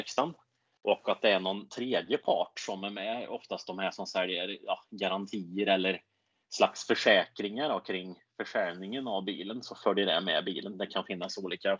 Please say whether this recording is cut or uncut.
uncut